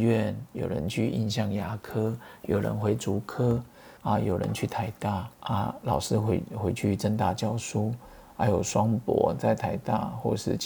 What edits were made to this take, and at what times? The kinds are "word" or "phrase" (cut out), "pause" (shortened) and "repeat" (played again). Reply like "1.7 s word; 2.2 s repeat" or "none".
4.0 s pause; 5.3 s pause